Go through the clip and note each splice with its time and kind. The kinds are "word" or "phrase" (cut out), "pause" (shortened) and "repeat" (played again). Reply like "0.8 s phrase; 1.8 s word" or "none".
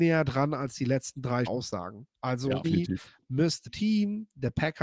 1.5 s word; 2.6 s word; 3.7 s word